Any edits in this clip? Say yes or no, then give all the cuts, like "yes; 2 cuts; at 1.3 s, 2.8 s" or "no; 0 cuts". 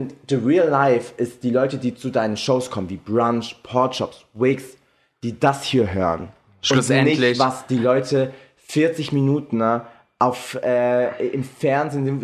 no; 0 cuts